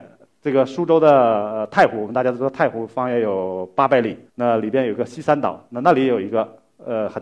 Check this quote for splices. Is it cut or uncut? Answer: cut